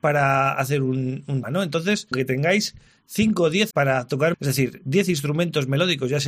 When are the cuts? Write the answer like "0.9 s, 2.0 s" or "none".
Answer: 1.4 s, 2.1 s, 3.7 s, 4.3 s